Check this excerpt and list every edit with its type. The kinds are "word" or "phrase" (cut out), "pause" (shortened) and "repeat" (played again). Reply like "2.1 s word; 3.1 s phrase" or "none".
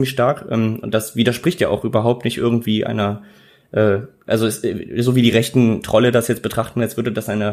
none